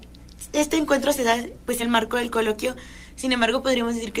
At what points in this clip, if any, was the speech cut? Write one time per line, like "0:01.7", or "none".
0:01.8